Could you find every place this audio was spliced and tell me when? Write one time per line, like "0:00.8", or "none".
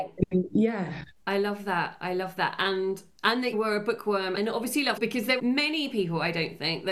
0:03.5
0:04.4
0:05.0
0:05.4

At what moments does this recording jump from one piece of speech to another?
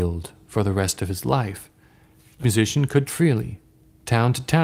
0:02.4
0:03.1

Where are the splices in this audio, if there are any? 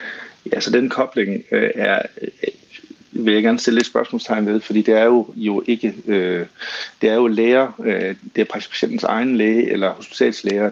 0:05.3

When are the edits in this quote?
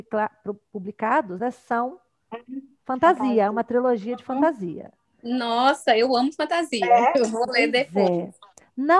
none

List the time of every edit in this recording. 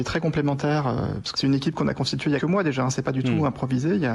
0:01.3
0:02.4

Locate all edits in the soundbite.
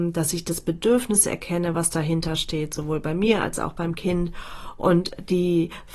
none

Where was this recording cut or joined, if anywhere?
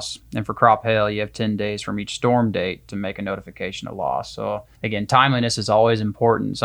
0:04.7

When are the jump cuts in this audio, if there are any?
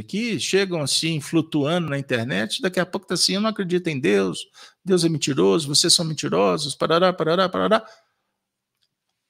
none

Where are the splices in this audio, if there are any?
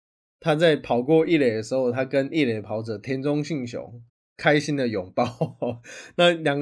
0:04.1

